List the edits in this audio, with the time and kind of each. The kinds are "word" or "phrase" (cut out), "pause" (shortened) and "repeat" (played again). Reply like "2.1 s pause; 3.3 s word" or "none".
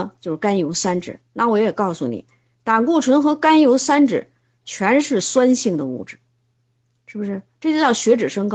none